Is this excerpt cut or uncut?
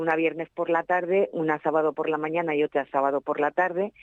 uncut